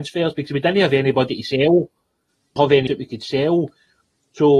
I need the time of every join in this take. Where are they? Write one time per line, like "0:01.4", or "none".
0:02.6
0:02.9